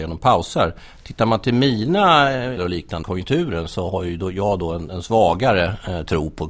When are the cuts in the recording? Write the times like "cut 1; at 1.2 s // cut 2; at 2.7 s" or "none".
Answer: cut 1; at 2.6 s // cut 2; at 3.0 s // cut 3; at 4.9 s